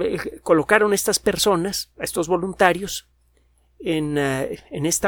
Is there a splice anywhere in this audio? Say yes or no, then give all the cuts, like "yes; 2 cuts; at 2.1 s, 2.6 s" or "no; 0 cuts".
no; 0 cuts